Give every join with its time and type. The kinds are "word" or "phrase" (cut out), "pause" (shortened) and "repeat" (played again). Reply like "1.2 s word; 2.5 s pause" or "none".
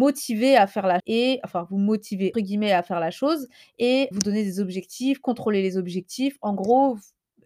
1.0 s word; 2.3 s word; 4.1 s word